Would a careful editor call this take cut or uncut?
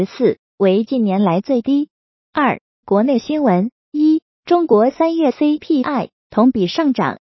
uncut